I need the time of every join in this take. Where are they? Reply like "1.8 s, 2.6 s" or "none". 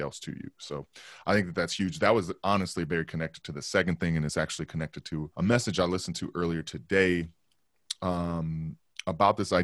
5.3 s